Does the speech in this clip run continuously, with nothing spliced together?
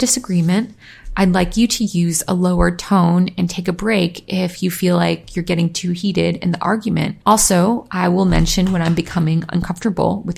no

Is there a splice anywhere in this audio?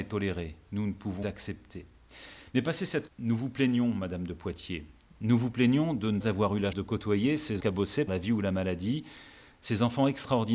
yes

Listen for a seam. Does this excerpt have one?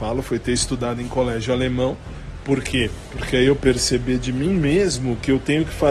yes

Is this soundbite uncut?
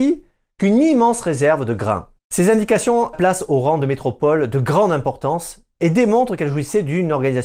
no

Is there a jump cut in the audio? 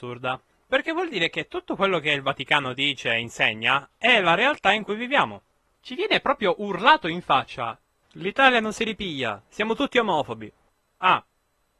no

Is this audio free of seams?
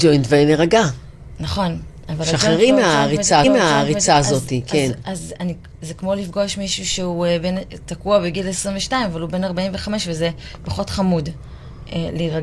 no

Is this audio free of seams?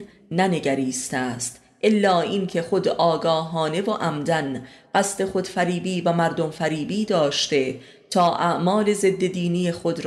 yes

